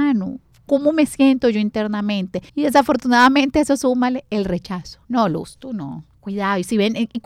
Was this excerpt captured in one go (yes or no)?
no